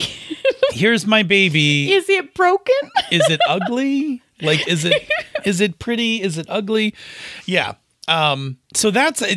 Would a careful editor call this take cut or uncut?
uncut